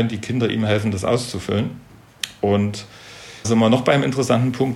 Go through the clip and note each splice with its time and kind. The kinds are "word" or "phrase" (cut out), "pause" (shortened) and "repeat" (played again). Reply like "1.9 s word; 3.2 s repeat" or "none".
3.4 s word